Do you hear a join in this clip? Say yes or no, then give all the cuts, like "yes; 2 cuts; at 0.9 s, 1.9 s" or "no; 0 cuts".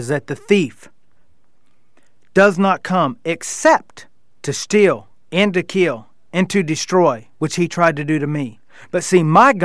no; 0 cuts